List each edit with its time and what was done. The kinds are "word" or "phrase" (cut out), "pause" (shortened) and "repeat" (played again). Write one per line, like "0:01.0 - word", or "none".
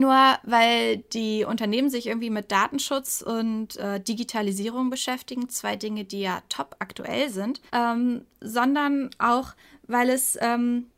0:07.7 - pause